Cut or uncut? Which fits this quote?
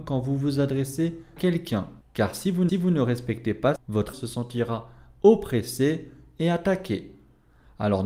cut